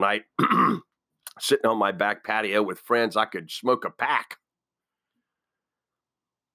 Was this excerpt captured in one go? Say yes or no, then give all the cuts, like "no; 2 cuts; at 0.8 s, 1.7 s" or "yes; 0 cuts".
yes; 0 cuts